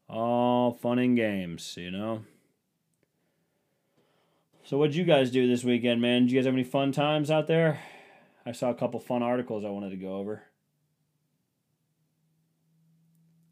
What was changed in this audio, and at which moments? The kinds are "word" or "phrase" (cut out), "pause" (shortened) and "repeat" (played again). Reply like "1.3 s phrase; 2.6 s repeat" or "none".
none